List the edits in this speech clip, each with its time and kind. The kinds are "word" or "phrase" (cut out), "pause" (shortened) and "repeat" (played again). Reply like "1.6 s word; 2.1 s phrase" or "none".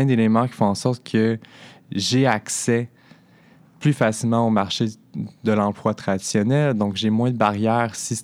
none